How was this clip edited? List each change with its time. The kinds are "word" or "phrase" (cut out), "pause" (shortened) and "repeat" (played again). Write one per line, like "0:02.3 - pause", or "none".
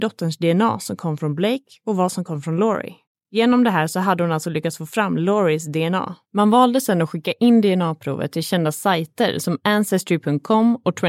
0:03.0 - pause
0:06.2 - pause